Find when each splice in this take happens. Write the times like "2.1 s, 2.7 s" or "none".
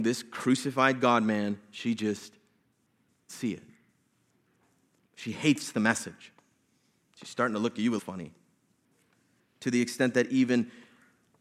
3.3 s, 8.0 s